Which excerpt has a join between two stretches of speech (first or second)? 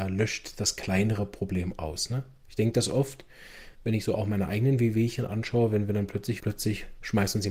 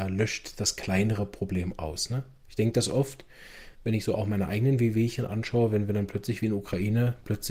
first